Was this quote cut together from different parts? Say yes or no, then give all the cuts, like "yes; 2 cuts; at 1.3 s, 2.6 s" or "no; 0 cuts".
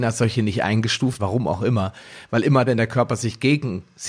yes; 2 cuts; at 1.2 s, 2.7 s